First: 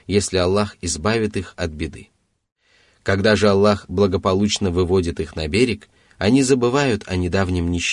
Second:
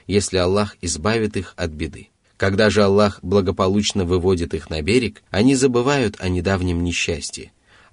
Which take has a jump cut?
second; 2 cuts; at 2.2 s, 5.3 s

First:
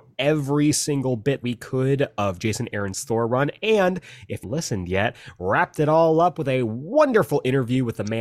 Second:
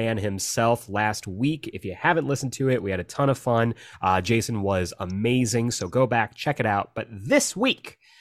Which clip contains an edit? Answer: first; 2 cuts; at 1.4 s, 4.4 s

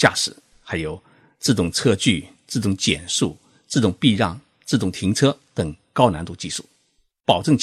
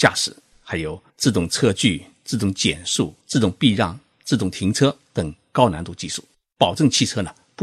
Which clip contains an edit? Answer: second; 3 cuts; at 1.1 s, 3.2 s, 6.3 s

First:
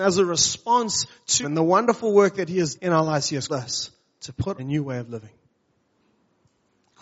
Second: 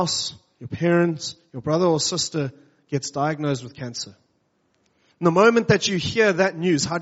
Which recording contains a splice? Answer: first; 4 cuts; at 1.4 s, 2.7 s, 3.5 s, 4.6 s

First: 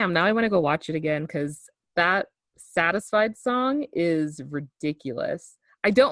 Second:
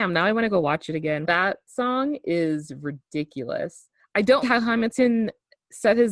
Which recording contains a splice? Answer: second; 3 cuts; at 1.2 s, 1.7 s, 4.4 s

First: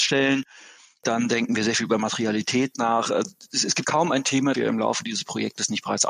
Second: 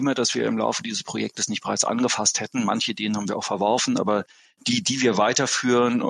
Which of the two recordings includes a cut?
first; 2 cuts; at 3.8 s, 4.5 s

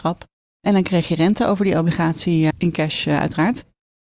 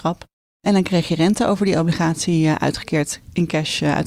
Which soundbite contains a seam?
first; 1 cut; at 2.5 s

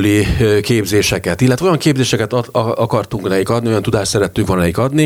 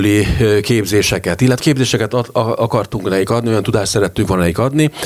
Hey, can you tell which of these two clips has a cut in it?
second; 1 cut; at 1.6 s

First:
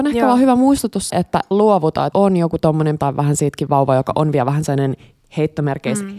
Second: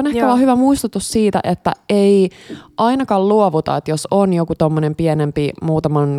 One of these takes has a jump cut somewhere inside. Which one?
first; 5 cuts; at 1.1 s, 1.5 s, 2.1 s, 3.0 s, 3.7 s

